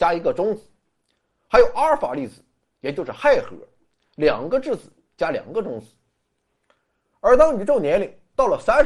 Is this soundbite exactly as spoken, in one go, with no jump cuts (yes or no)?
yes